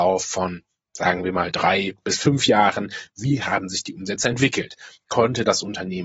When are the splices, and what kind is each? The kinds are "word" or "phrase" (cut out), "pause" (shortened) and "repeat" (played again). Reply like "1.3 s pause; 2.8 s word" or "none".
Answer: none